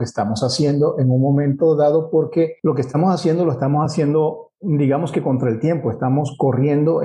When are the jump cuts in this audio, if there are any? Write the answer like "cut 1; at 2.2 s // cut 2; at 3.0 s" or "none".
none

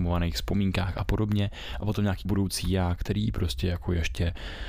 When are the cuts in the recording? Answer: cut 1; at 2.3 s

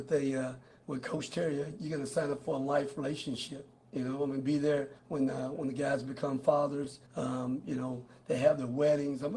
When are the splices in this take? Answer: cut 1; at 5.0 s // cut 2; at 7.1 s

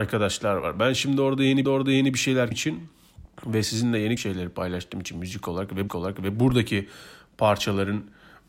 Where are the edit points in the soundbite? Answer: cut 1; at 1.6 s // cut 2; at 2.5 s // cut 3; at 3.2 s // cut 4; at 4.2 s // cut 5; at 5.9 s

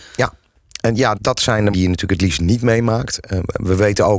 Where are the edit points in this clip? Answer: cut 1; at 1.1 s // cut 2; at 1.7 s

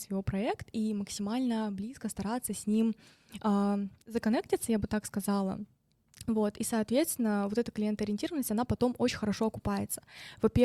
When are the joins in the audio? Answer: none

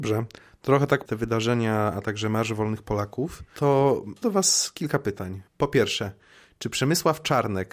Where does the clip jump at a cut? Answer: cut 1; at 1.1 s // cut 2; at 4.2 s // cut 3; at 5.5 s

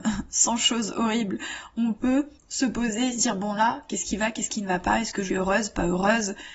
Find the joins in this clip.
cut 1; at 2.4 s // cut 2; at 5.3 s

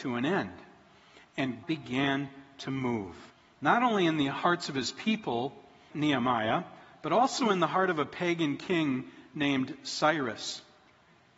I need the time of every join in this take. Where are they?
cut 1; at 1.6 s // cut 2; at 3.3 s // cut 3; at 5.9 s

